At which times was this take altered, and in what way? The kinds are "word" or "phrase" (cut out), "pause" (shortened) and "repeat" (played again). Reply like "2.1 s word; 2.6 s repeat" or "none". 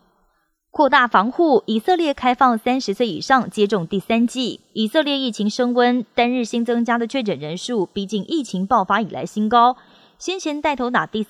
none